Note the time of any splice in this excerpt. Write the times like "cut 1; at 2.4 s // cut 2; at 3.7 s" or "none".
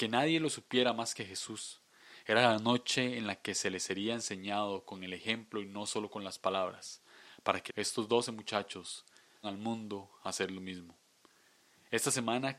cut 1; at 7.7 s // cut 2; at 9.4 s